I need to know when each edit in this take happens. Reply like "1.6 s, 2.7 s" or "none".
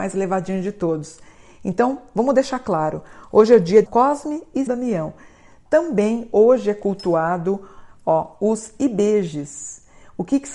3.9 s, 4.7 s